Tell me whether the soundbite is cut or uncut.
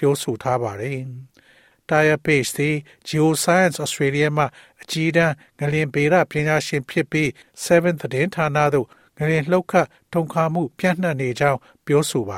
uncut